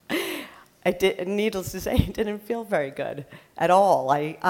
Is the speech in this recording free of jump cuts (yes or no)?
yes